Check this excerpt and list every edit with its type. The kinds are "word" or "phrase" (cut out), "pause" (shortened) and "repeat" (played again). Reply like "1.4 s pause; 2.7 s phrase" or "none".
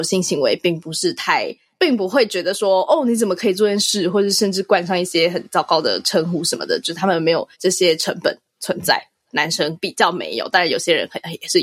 7.5 s pause